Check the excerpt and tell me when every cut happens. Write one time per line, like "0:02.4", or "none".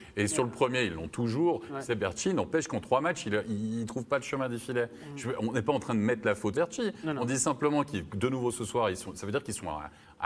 0:06.5